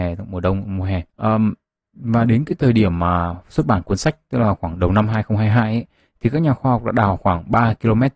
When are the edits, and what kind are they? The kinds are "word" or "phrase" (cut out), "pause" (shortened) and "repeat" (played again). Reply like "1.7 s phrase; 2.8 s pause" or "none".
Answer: 1.1 s pause